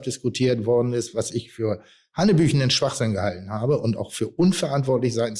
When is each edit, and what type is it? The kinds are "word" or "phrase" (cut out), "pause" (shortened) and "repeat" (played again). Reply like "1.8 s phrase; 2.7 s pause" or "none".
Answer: none